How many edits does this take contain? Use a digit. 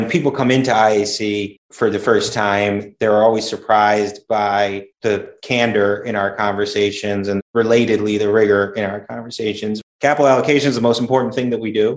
3